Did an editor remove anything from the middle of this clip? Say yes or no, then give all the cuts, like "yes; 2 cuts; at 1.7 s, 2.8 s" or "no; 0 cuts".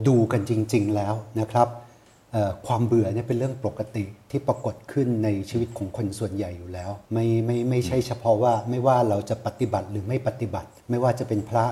yes; 2 cuts; at 7.0 s, 10.8 s